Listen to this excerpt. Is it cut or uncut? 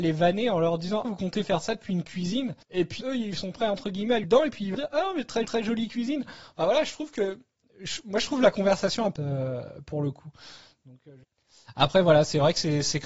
cut